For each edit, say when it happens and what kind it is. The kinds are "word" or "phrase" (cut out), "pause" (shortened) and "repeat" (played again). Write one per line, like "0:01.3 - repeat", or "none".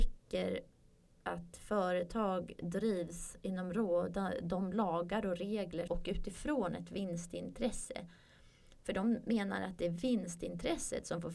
0:05.9 - phrase